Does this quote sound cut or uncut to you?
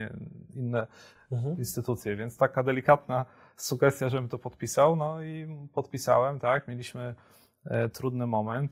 uncut